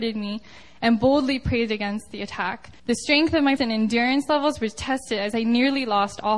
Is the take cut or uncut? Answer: cut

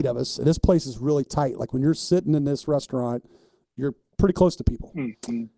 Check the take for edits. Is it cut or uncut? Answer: uncut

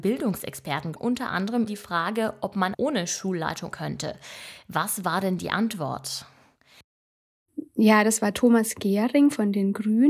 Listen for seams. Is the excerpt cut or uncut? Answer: cut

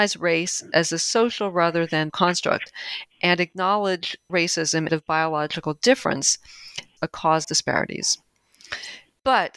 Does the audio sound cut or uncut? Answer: cut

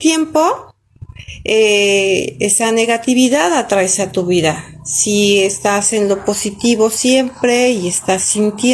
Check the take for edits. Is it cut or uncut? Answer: uncut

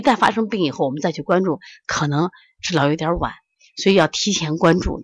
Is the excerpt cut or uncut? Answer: uncut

